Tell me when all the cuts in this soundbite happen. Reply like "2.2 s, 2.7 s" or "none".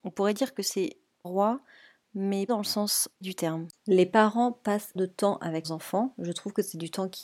1.2 s, 2.5 s, 3.2 s, 3.8 s, 5.0 s, 5.6 s

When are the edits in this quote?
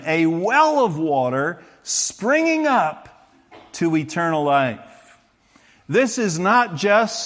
none

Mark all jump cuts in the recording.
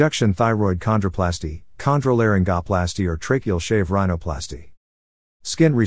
none

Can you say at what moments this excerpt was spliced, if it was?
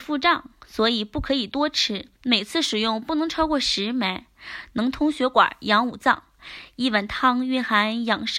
2.1 s

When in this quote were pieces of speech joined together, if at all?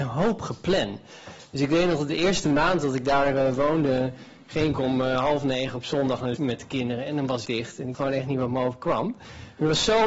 6.4 s, 7.4 s, 7.9 s

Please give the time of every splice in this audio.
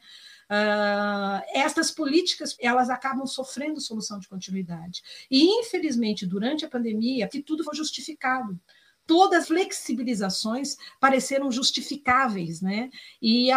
2.6 s, 7.3 s, 7.7 s, 9.4 s

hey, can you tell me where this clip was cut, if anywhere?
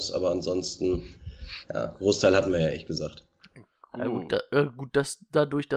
none

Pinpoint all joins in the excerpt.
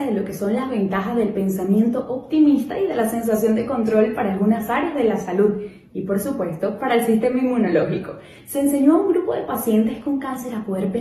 none

